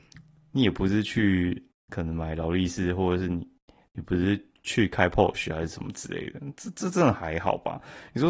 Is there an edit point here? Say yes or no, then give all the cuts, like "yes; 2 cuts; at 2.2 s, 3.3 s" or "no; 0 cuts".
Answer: no; 0 cuts